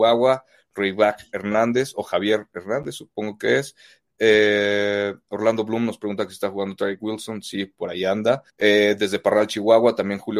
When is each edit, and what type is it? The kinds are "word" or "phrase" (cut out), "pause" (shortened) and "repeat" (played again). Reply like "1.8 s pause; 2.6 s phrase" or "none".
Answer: 8.5 s pause